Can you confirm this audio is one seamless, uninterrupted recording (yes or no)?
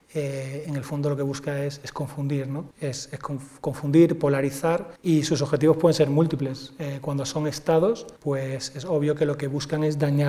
no